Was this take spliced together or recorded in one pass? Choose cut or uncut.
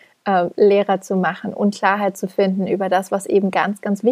uncut